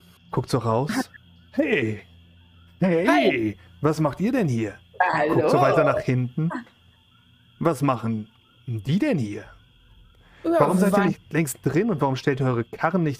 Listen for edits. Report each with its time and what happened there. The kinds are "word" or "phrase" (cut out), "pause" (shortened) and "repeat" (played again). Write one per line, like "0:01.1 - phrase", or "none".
none

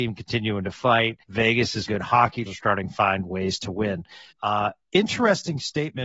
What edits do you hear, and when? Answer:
0:01.2 - pause
0:01.9 - word
0:02.5 - word
0:04.3 - pause

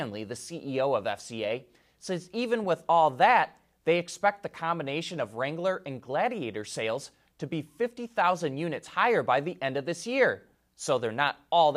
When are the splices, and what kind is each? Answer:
none

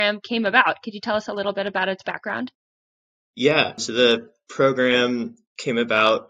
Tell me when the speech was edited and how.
none

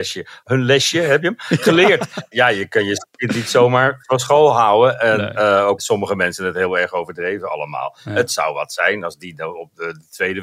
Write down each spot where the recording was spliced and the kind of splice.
0:05.8 - phrase

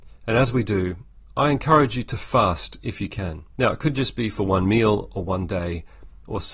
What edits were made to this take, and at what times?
0:03.5 - pause

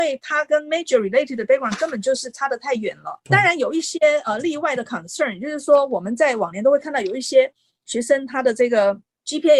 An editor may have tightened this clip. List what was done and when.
none

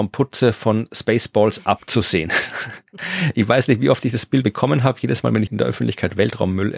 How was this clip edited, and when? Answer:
0:04.4 - word
0:05.5 - word

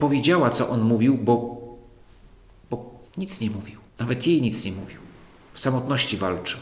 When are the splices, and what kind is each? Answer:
0:03.1 - pause
0:03.9 - pause

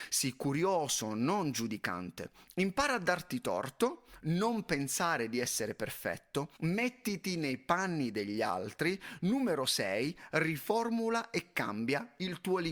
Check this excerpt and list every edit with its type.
0:06.6 - pause

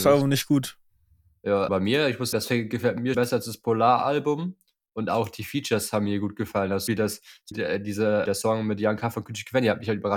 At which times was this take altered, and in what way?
0:01.7 - word
0:02.3 - word
0:03.1 - word
0:06.9 - word
0:07.5 - word
0:08.3 - word

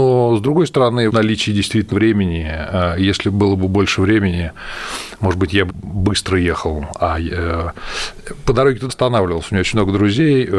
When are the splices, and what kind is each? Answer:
0:01.1 - word
0:01.9 - phrase
0:05.7 - phrase
0:08.9 - word

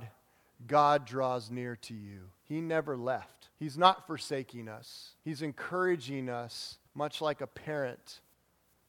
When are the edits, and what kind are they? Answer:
0:02.4 - pause
0:03.5 - pause
0:05.2 - pause
0:06.9 - pause

